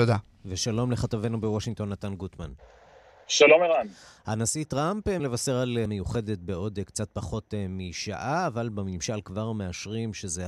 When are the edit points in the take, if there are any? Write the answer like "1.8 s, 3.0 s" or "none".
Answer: 5.2 s, 5.9 s